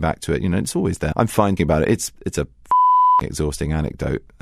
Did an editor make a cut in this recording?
yes; 2 cuts; at 1.1 s, 1.6 s

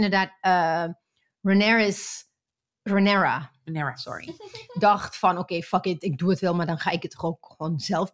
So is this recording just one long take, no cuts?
yes; 0 cuts

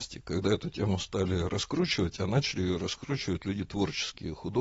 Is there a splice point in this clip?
no; 0 cuts

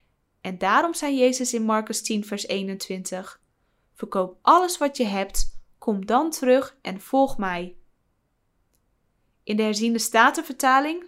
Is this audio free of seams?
yes; 0 cuts

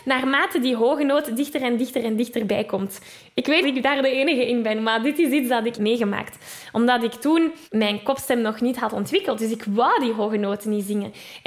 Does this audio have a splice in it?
yes; 3 cuts; at 3.6 s, 5.7 s, 7.6 s

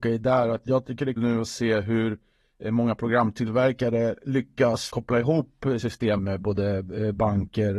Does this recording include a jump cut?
yes; 4 cuts; at 1.2 s, 4.9 s, 5.8 s, 6.2 s

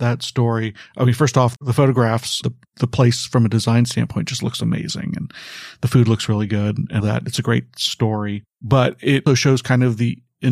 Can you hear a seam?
yes; 4 cuts; at 1.6 s, 2.4 s, 7.0 s, 9.3 s

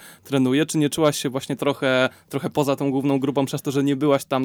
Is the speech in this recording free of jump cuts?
no; 1 cut; at 1.6 s

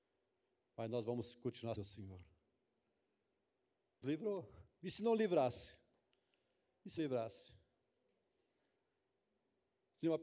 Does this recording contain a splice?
yes; 3 cuts; at 1.7 s, 4.0 s, 7.0 s

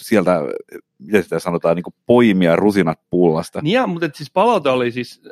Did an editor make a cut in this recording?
no; 0 cuts

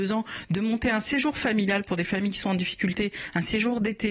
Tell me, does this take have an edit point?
no; 0 cuts

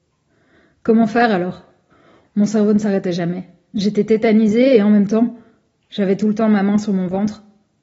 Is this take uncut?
yes; 0 cuts

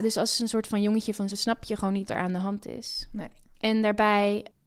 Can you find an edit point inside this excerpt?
yes; 2 cuts; at 1.3 s, 2.1 s

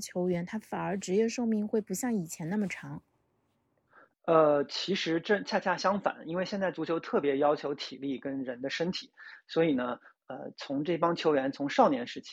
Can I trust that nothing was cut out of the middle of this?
yes; 0 cuts

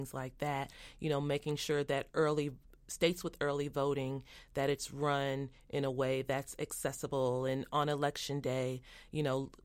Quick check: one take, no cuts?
yes; 0 cuts

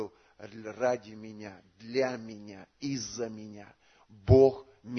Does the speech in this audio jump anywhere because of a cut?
no; 0 cuts

